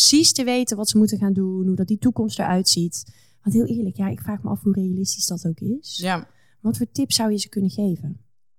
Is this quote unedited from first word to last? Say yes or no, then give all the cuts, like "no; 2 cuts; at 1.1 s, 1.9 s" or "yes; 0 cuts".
yes; 0 cuts